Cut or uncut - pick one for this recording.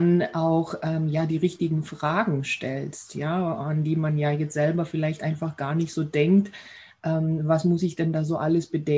uncut